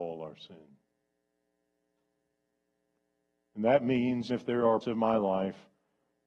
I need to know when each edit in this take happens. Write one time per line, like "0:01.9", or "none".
0:04.3
0:04.8